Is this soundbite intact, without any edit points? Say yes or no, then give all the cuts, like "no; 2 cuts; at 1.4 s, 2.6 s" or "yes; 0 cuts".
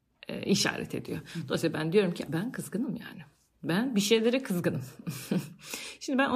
no; 1 cut; at 2.3 s